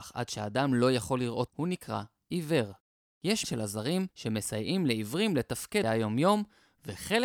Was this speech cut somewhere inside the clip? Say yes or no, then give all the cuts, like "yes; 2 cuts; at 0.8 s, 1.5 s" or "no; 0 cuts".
yes; 4 cuts; at 1.5 s, 3.4 s, 4.1 s, 5.8 s